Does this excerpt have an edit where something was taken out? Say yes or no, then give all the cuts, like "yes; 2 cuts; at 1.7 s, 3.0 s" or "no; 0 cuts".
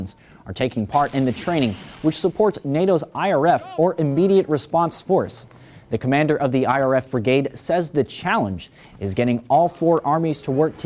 no; 0 cuts